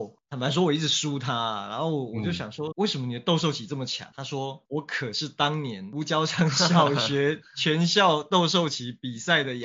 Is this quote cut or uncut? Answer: cut